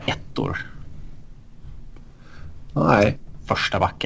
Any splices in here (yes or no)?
no